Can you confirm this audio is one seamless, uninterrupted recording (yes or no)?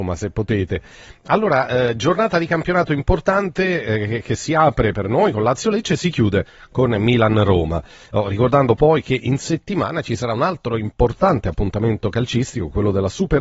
yes